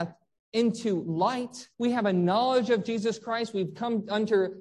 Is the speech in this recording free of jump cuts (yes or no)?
no